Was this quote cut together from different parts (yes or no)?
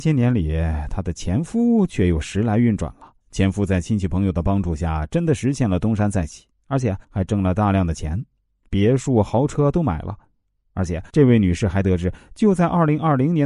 yes